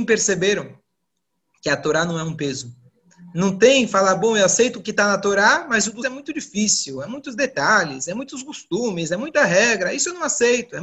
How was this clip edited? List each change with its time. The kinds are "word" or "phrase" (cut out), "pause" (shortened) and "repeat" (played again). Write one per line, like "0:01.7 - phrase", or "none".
0:06.0 - word